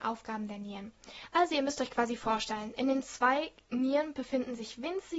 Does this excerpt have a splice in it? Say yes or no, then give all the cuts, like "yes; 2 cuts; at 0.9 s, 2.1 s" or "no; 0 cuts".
no; 0 cuts